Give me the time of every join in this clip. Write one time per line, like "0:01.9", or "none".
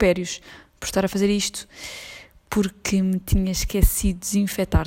none